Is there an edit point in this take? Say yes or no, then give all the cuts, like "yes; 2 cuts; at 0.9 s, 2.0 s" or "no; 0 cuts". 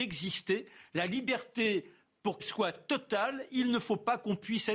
yes; 1 cut; at 2.4 s